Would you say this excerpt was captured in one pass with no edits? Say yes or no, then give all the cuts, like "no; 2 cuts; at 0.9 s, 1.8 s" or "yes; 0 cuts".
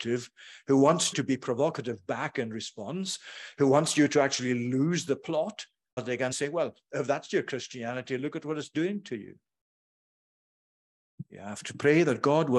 no; 3 cuts; at 1.1 s, 6.0 s, 6.3 s